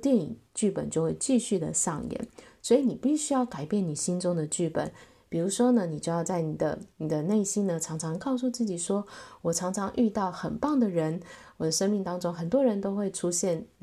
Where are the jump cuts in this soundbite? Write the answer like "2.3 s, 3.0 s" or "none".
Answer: none